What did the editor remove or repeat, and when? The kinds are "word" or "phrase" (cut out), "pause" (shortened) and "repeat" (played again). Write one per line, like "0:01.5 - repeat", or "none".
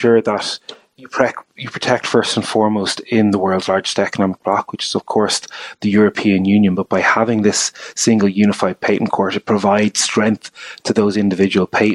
none